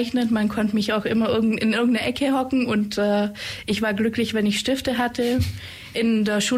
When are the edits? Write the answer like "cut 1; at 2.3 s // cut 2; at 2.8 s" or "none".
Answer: none